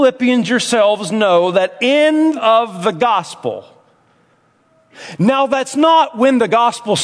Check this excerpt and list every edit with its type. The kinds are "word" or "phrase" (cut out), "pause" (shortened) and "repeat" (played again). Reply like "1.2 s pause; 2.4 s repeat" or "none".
2.4 s phrase